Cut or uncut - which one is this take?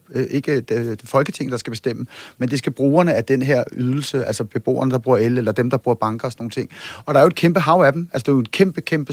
uncut